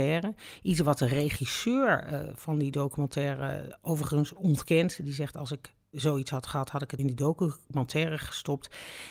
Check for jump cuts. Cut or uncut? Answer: cut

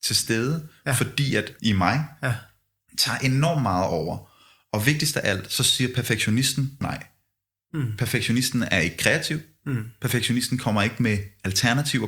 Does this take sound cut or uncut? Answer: cut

